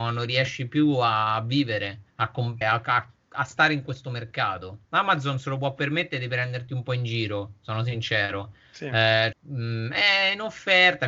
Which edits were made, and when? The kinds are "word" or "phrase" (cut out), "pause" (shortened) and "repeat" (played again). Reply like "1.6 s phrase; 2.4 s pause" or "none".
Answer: 2.1 s pause; 2.6 s word; 4.8 s pause; 9.3 s word